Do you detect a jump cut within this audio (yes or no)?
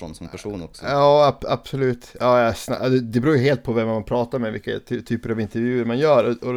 no